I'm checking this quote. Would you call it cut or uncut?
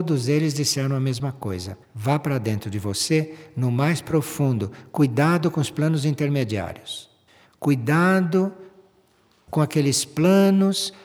cut